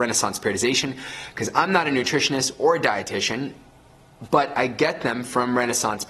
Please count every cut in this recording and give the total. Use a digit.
0